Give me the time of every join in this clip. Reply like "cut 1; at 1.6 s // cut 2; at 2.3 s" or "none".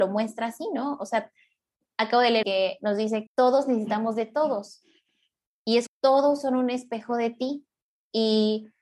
cut 1; at 2.4 s // cut 2; at 3.3 s // cut 3; at 5.9 s